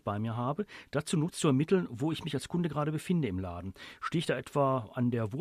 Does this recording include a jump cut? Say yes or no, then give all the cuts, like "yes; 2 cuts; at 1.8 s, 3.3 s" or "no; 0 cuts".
no; 0 cuts